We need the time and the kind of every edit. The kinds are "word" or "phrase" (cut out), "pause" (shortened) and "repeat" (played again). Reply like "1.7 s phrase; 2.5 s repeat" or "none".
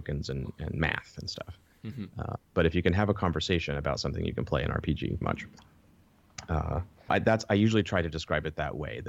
2.5 s pause; 5.2 s word; 7.1 s word